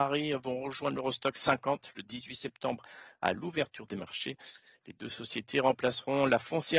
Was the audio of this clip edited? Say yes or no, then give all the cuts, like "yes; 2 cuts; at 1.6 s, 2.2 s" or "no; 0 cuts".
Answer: no; 0 cuts